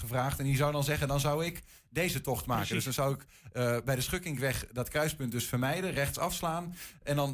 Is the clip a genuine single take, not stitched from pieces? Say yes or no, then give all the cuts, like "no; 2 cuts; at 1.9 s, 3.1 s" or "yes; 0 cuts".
yes; 0 cuts